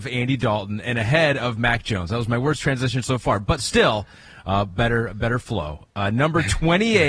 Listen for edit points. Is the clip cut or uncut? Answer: uncut